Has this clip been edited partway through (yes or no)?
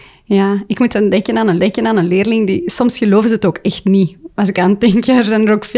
yes